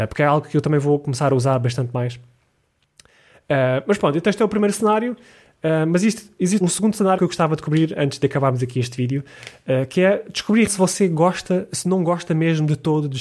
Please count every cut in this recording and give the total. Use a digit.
3